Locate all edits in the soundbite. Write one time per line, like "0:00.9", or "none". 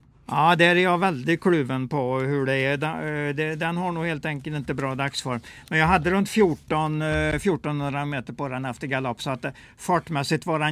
none

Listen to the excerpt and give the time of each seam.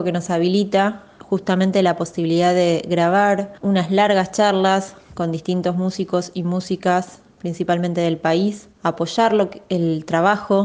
0:03.6
0:08.7

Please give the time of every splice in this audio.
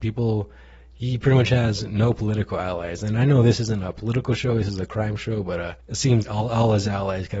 0:06.2

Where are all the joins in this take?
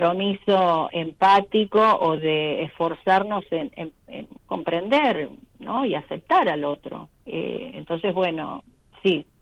0:04.4
0:07.1

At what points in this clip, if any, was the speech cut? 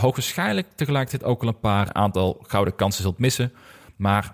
0:01.9

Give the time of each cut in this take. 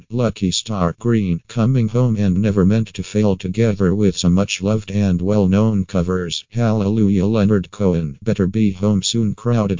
none

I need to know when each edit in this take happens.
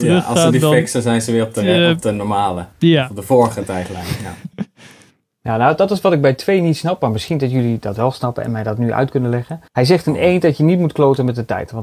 0:02.7
0:04.5
0:09.7

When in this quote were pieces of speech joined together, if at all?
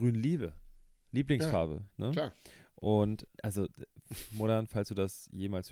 0:03.3

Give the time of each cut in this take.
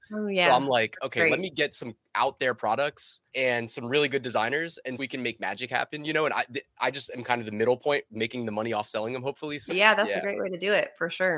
0:03.3
0:05.0
0:09.7

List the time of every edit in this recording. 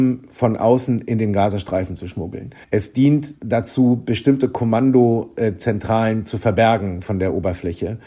0:02.6
0:03.4

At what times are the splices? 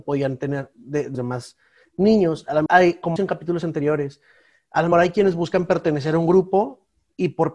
0:01.1
0:02.7
0:03.2
0:04.9

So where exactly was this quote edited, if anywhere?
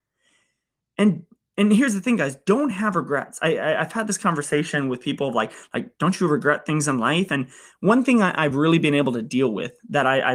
none

